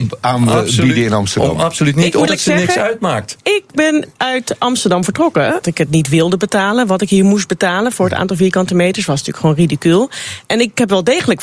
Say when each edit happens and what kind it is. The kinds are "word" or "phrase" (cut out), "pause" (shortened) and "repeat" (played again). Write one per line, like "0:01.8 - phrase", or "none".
0:02.3 - word
0:05.6 - word

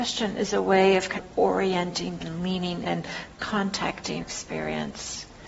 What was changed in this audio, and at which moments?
0:01.1 - word
0:02.2 - word
0:02.8 - word
0:04.2 - word

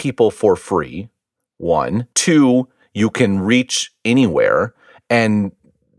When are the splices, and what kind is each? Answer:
0:02.1 - pause

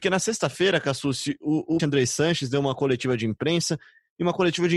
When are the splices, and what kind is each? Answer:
0:01.8 - phrase

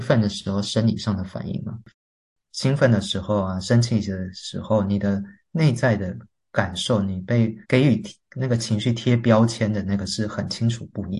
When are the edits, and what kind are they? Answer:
0:07.6 - pause

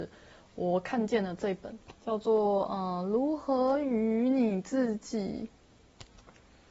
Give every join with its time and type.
0:02.0 - pause

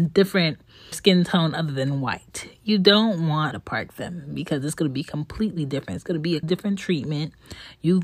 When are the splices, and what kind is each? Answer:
0:00.9 - word
0:03.5 - word
0:06.4 - word

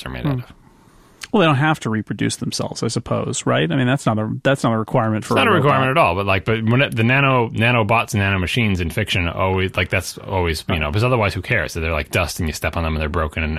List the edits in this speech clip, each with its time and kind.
none

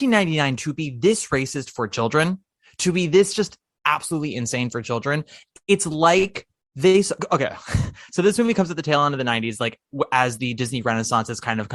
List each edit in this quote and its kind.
none

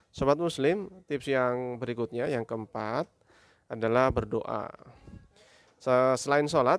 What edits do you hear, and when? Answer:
none

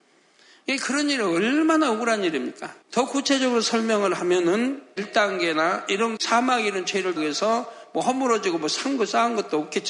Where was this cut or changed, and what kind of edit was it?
0:02.8 - pause
0:05.0 - word
0:06.2 - word
0:07.2 - word

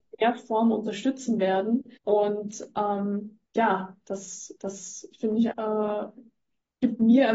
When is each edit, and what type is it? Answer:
0:02.0 - pause
0:03.5 - pause
0:04.6 - repeat
0:05.5 - word

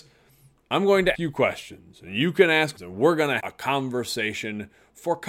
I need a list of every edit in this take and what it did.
0:01.1 - word
0:02.8 - phrase
0:03.4 - word

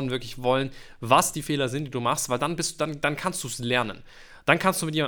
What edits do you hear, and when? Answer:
none

